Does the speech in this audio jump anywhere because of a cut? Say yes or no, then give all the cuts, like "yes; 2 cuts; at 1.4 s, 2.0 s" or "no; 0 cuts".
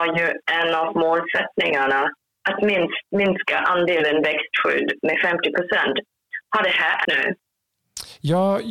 yes; 3 cuts; at 3.1 s, 6.4 s, 7.0 s